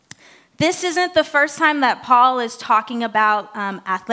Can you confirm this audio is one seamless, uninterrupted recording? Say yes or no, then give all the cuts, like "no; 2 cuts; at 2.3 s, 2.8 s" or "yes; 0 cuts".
yes; 0 cuts